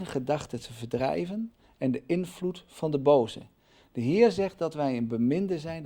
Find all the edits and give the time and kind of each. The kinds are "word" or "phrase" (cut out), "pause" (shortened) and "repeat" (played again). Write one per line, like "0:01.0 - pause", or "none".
none